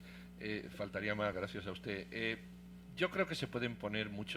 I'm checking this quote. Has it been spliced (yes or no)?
no